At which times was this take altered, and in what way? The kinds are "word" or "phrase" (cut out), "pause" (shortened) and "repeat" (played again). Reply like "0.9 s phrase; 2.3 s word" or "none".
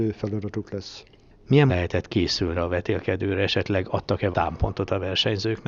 1.7 s word; 2.5 s word; 4.3 s word